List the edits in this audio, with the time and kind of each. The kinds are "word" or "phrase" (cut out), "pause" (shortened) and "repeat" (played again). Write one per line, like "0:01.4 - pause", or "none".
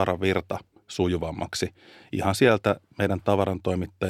none